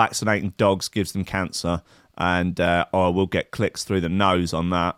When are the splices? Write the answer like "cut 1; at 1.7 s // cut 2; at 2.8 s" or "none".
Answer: none